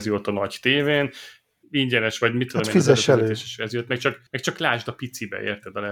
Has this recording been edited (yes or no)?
yes